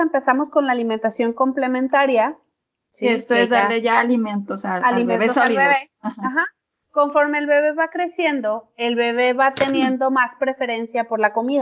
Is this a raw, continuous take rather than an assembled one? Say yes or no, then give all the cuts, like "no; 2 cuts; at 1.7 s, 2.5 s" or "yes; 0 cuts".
yes; 0 cuts